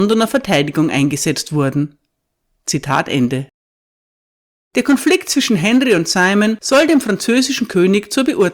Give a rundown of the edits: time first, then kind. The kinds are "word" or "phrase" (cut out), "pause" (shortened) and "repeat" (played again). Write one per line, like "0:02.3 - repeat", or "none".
none